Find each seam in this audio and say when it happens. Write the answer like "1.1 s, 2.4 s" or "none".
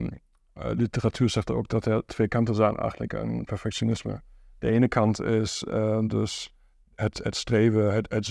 none